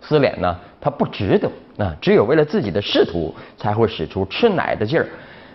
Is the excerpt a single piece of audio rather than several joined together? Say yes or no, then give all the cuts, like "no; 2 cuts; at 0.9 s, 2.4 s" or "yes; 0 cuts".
yes; 0 cuts